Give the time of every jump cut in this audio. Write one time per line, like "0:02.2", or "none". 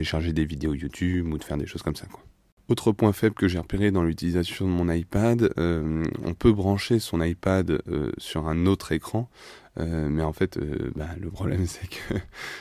none